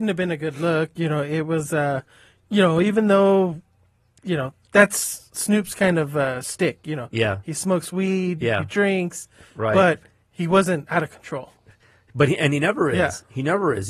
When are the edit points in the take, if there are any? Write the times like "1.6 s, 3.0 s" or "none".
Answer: none